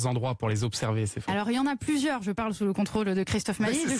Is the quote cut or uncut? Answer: uncut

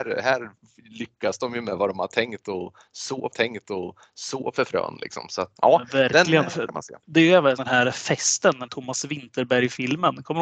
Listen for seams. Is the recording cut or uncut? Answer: cut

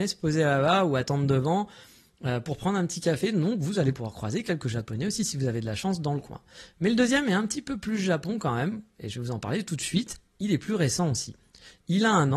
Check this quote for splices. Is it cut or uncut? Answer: uncut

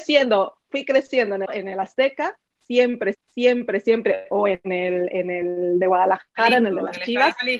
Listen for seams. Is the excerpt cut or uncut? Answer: cut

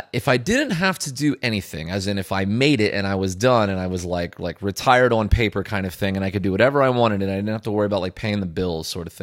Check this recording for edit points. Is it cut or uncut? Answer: uncut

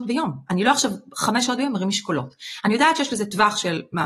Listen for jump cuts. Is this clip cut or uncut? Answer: uncut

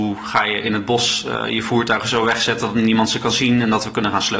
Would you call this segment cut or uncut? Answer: uncut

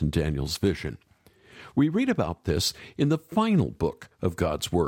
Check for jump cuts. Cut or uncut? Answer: uncut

